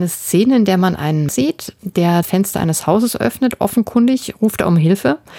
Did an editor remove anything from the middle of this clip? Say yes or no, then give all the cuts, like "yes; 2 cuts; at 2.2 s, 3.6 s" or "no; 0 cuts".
yes; 2 cuts; at 1.3 s, 2.2 s